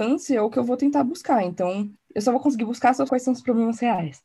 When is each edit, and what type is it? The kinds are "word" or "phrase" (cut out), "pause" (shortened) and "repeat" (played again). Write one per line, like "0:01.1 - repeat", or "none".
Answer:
0:02.0 - pause
0:03.1 - word